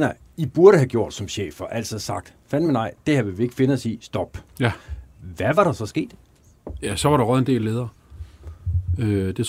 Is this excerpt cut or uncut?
uncut